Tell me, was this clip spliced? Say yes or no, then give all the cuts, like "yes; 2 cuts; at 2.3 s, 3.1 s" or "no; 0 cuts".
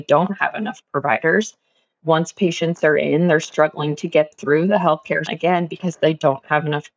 yes; 2 cuts; at 4.3 s, 5.3 s